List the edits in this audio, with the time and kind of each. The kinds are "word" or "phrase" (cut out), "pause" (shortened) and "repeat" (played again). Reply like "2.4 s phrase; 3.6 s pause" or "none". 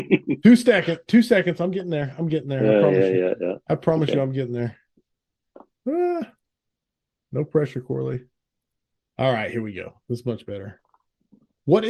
none